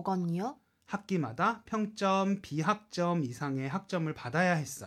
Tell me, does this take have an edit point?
no; 0 cuts

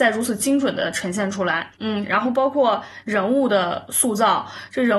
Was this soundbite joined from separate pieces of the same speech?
yes; 1 cut; at 1.7 s

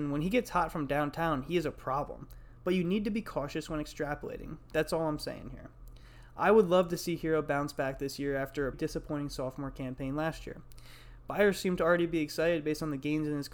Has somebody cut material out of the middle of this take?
yes; 1 cut; at 8.7 s

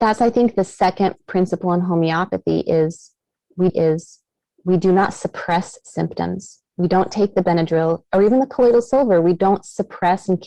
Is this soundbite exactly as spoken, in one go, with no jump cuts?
no; 1 cut; at 3.7 s

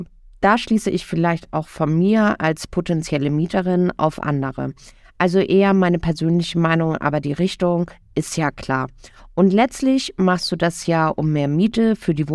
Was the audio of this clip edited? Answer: no; 0 cuts

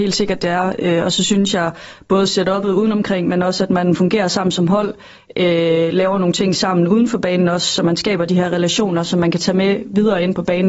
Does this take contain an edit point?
no; 0 cuts

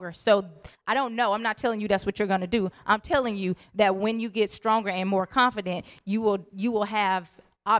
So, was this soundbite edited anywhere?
no; 0 cuts

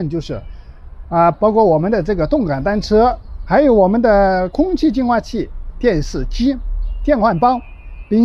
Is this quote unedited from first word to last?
no; 2 cuts; at 1.3 s, 3.5 s

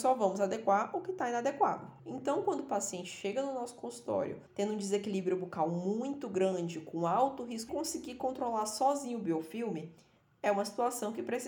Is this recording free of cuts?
no; 3 cuts; at 2.0 s, 4.5 s, 7.7 s

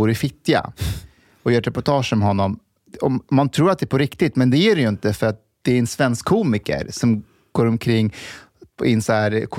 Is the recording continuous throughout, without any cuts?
yes; 0 cuts

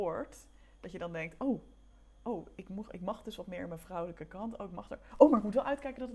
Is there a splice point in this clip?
no; 0 cuts

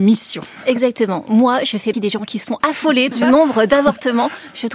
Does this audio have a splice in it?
yes; 3 cuts; at 1.9 s, 2.6 s, 3.1 s

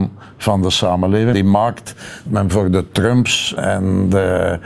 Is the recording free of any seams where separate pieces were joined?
no; 3 cuts; at 1.3 s, 2.3 s, 3.6 s

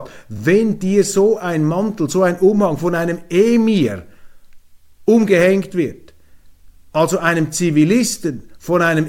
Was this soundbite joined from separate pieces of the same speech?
no; 0 cuts

